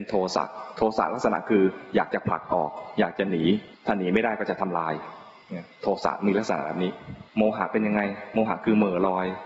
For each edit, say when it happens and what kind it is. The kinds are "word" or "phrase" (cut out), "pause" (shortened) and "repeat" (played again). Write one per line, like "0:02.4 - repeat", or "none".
0:03.7 - pause
0:05.7 - pause
0:07.3 - pause